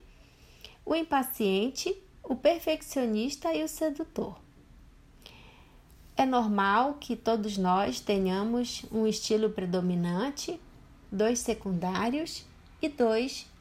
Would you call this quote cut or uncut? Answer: uncut